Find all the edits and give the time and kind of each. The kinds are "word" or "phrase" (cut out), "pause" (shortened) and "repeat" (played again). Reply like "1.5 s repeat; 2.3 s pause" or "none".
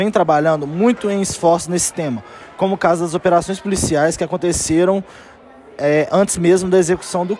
none